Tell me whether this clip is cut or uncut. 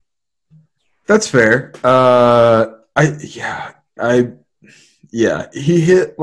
cut